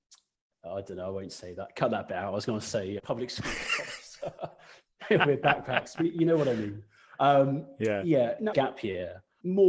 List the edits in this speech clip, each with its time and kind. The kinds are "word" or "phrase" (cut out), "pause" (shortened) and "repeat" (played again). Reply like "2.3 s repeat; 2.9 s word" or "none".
3.0 s word; 8.5 s phrase